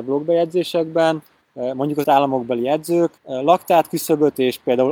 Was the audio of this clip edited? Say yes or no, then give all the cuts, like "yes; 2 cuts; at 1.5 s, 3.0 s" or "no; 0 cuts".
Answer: yes; 3 cuts; at 1.4 s, 2.0 s, 3.2 s